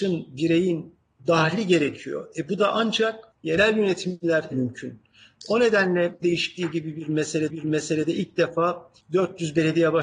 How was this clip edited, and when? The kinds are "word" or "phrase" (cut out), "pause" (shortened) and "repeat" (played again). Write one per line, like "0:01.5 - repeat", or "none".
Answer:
0:01.2 - word
0:03.3 - pause
0:04.5 - word
0:06.2 - word
0:07.5 - repeat
0:09.0 - pause